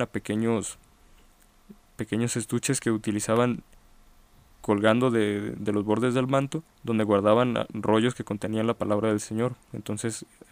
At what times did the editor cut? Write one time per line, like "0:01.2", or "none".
0:06.7